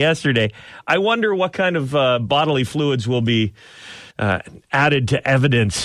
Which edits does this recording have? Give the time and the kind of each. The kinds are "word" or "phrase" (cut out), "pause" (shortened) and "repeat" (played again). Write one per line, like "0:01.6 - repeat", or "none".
0:04.1 - pause